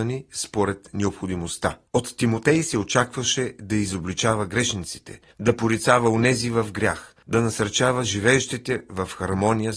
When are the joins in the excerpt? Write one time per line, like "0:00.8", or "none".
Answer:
0:01.9
0:05.3
0:07.2